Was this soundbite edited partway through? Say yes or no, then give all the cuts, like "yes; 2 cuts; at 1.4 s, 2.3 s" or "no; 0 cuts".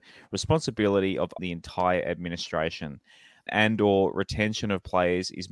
yes; 2 cuts; at 1.4 s, 3.5 s